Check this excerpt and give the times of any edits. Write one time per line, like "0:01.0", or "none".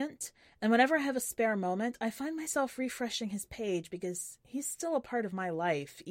none